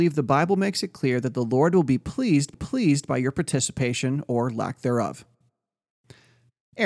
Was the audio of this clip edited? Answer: yes; 1 cut; at 2.5 s

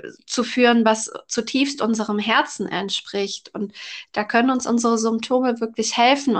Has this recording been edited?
no; 0 cuts

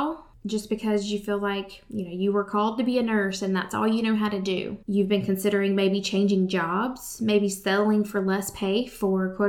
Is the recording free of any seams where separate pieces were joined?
no; 1 cut; at 4.8 s

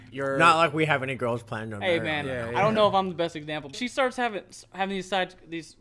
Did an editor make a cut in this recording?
yes; 1 cut; at 3.7 s

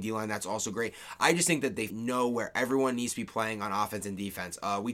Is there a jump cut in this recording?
yes; 1 cut; at 1.9 s

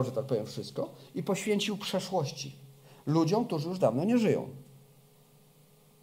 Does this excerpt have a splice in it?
no; 0 cuts

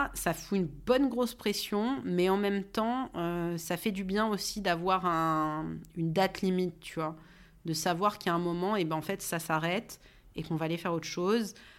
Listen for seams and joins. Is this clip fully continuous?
yes; 0 cuts

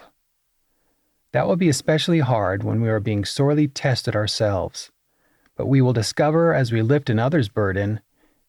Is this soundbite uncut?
yes; 0 cuts

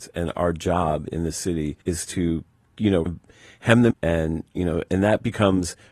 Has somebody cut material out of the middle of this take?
yes; 3 cuts; at 1.8 s, 3.1 s, 3.9 s

